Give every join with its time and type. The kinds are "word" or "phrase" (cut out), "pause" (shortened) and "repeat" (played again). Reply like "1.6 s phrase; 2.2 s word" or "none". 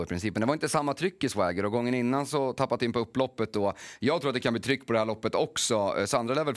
2.8 s word